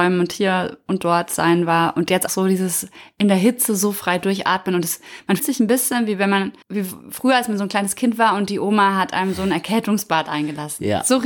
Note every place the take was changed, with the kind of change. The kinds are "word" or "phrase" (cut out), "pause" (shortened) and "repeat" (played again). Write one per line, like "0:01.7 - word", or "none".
0:02.3 - word
0:05.4 - word
0:06.6 - pause